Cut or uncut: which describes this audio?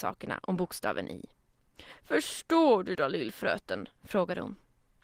cut